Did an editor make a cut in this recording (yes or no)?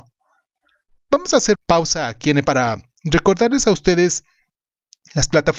yes